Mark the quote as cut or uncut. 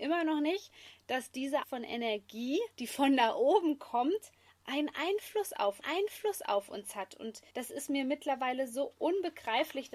cut